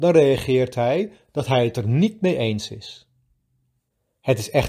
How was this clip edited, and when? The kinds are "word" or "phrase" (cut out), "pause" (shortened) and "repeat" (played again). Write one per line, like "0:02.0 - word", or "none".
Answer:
none